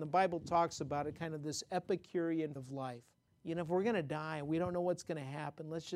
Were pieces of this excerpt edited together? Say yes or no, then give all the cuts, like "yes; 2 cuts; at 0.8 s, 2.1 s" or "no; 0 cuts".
yes; 2 cuts; at 2.6 s, 3.3 s